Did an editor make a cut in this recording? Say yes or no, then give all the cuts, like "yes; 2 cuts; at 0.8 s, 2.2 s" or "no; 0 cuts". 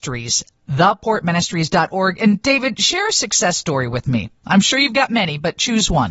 no; 0 cuts